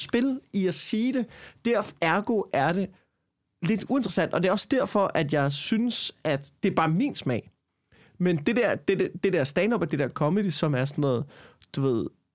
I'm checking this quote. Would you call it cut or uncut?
uncut